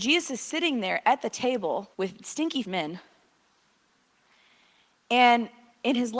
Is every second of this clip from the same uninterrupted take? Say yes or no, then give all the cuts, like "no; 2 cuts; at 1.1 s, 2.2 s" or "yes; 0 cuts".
no; 2 cuts; at 1.9 s, 2.6 s